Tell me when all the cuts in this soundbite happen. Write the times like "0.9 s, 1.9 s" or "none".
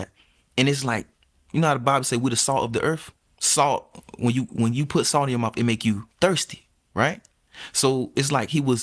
none